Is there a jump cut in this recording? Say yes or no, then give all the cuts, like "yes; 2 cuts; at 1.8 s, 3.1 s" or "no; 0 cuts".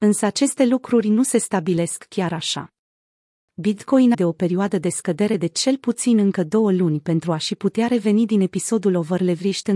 yes; 1 cut; at 4.1 s